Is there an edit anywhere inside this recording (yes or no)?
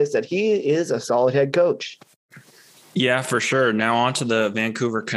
no